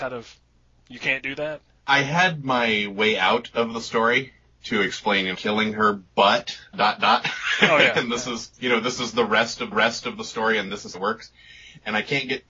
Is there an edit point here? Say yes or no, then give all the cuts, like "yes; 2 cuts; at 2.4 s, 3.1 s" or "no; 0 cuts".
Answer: yes; 6 cuts; at 1.7 s, 5.3 s, 6.7 s, 8.5 s, 9.7 s, 10.9 s